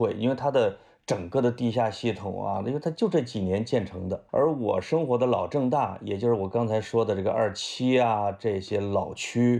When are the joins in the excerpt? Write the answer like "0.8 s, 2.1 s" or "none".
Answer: 4.3 s